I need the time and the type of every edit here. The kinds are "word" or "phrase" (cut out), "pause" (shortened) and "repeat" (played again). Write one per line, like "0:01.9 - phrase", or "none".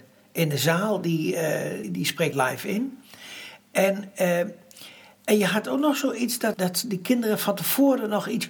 0:01.8 - word
0:02.3 - word
0:06.5 - word